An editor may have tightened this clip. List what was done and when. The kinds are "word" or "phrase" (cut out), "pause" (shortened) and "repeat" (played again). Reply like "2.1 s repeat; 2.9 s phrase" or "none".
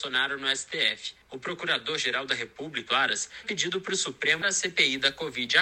1.2 s pause; 2.9 s word; 3.4 s word; 4.4 s word